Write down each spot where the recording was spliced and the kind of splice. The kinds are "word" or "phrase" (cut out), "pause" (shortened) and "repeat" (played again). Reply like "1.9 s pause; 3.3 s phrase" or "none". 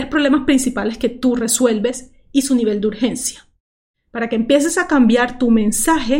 none